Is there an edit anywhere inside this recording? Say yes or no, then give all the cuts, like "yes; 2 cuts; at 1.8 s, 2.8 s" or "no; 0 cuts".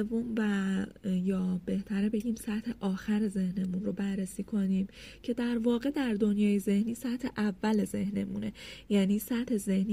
no; 0 cuts